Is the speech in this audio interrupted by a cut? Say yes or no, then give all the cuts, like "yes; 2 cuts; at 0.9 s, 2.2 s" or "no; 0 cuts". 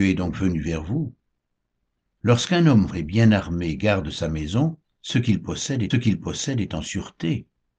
yes; 3 cuts; at 2.9 s, 4.8 s, 5.9 s